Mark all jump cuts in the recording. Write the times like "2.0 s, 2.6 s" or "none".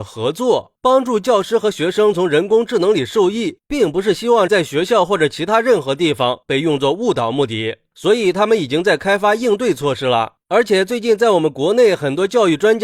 4.5 s